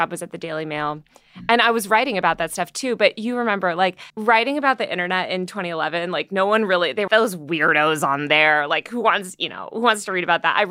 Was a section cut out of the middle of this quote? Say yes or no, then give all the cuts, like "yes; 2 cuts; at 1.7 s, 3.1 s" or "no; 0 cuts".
yes; 2 cuts; at 4.1 s, 7.1 s